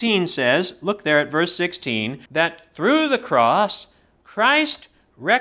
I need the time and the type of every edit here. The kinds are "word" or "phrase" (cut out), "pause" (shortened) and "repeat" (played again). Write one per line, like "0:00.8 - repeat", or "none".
0:02.3 - pause